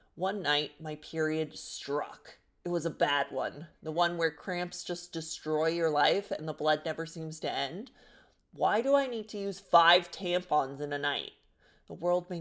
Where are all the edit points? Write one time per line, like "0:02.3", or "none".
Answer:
none